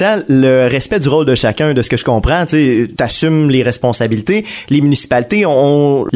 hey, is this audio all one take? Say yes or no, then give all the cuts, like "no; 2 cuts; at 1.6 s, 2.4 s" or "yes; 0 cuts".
yes; 0 cuts